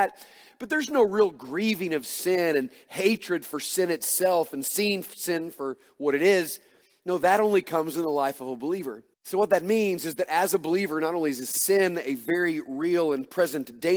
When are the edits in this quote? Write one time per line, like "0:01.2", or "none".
0:09.1